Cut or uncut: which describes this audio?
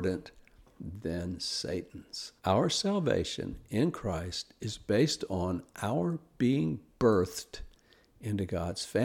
cut